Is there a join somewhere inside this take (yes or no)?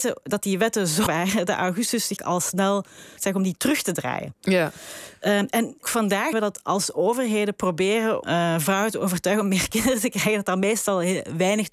yes